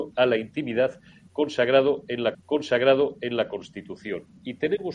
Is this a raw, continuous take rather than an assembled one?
no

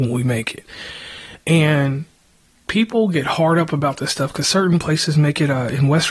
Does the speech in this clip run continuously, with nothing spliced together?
yes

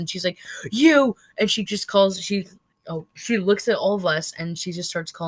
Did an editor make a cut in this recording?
yes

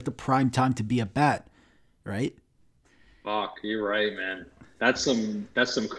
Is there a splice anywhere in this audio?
no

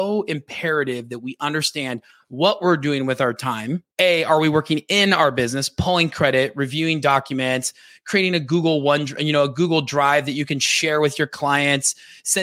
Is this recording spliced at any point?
yes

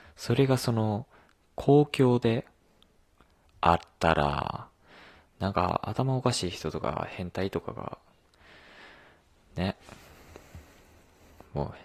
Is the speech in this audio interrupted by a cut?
no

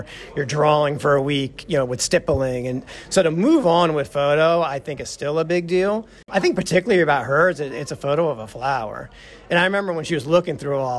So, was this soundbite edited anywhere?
no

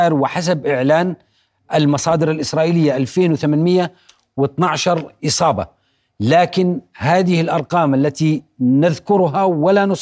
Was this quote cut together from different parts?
no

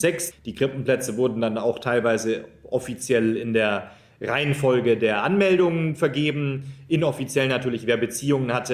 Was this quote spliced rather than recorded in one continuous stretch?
no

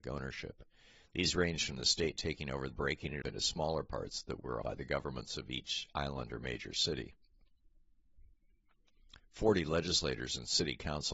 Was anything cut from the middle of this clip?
yes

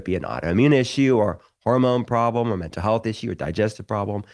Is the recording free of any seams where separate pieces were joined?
yes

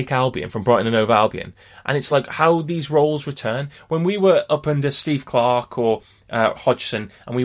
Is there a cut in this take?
no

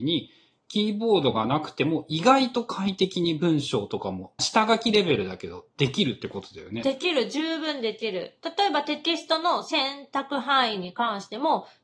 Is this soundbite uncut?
no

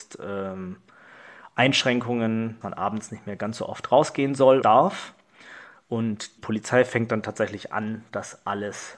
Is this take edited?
yes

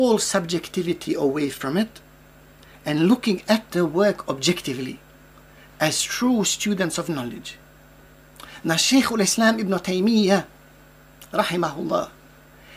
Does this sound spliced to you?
no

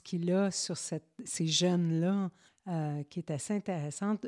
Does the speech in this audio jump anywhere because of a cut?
yes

